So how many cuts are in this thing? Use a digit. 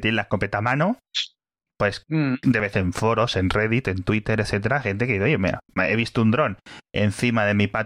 2